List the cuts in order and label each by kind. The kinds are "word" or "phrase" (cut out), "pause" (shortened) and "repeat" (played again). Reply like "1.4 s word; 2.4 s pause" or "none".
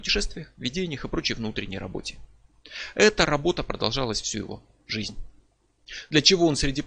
none